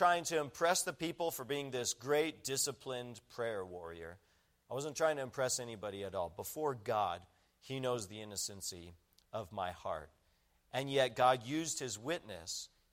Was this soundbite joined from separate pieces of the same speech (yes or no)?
no